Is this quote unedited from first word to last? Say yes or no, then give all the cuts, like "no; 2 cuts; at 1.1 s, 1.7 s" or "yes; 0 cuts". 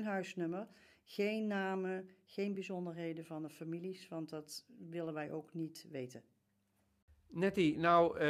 yes; 0 cuts